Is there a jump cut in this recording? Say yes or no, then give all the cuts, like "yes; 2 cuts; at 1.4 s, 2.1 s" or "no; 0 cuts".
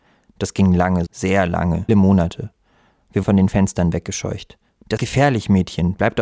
yes; 4 cuts; at 1.1 s, 1.9 s, 3.2 s, 5.0 s